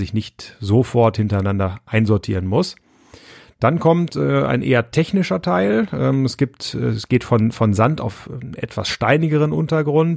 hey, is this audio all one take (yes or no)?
yes